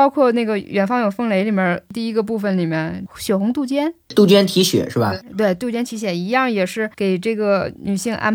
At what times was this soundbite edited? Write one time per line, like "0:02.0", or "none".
0:06.9